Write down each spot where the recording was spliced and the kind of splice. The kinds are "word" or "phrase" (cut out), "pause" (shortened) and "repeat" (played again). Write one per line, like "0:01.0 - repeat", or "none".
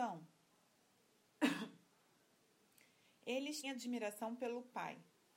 0:03.6 - word